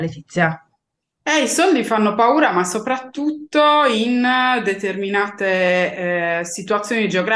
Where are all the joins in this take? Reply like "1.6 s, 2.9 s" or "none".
none